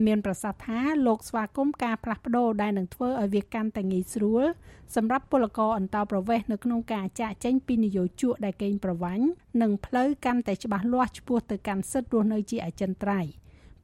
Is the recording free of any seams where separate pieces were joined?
no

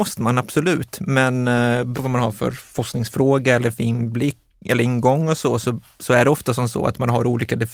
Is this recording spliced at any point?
yes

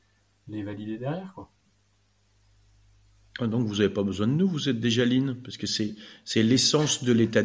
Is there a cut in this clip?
no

